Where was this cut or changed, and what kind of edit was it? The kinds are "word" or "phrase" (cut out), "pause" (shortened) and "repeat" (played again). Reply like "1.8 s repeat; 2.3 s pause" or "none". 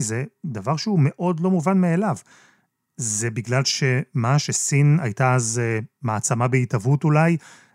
none